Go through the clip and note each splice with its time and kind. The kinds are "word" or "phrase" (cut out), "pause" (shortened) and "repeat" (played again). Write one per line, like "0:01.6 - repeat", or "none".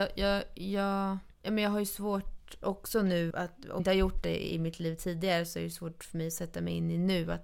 0:01.3 - pause
0:03.3 - word
0:03.8 - word

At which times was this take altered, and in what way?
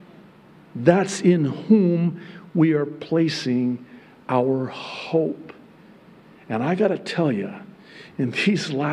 none

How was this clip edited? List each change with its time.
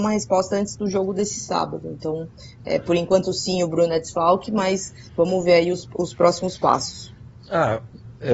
0:05.1 - pause

